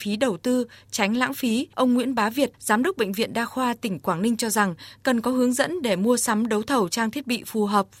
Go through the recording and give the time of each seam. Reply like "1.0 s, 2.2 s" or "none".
1.7 s, 2.5 s